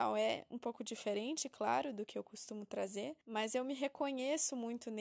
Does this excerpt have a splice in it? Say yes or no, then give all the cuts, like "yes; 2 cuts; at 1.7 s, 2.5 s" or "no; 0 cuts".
yes; 1 cut; at 3.2 s